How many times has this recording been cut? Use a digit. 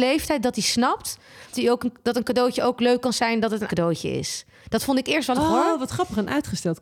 3